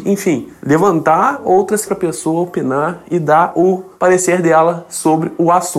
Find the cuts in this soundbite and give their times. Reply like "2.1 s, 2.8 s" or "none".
1.9 s